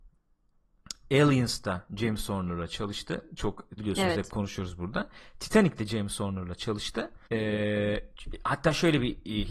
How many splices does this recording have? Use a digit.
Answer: 2